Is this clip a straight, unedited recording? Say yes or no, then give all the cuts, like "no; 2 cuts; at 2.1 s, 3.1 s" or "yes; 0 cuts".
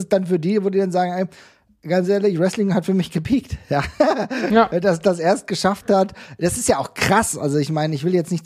yes; 0 cuts